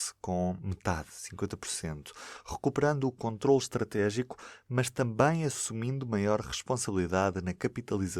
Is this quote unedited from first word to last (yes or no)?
yes